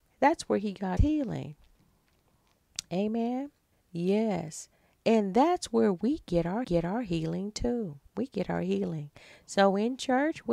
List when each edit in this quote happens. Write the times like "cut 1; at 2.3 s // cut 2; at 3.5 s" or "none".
cut 1; at 1.0 s // cut 2; at 3.7 s // cut 3; at 6.6 s // cut 4; at 8.1 s